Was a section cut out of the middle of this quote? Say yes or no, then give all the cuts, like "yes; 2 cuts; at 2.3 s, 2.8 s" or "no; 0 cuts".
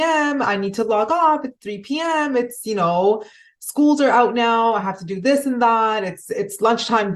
no; 0 cuts